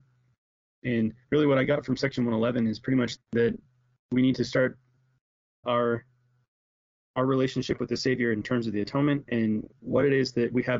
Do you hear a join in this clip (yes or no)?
yes